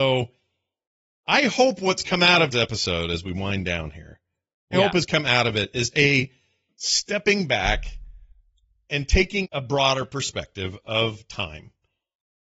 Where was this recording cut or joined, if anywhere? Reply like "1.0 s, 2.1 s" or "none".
2.5 s, 4.7 s, 5.9 s, 9.4 s